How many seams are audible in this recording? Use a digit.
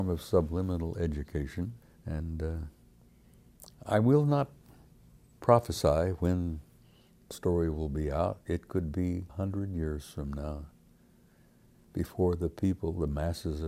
4